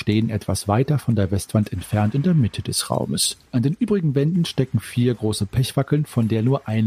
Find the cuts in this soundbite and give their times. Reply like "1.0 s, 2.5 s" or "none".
3.5 s